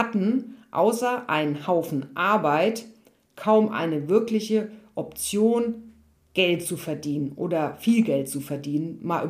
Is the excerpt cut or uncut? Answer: uncut